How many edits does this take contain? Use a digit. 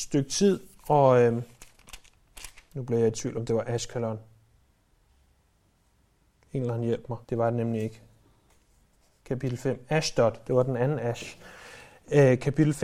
1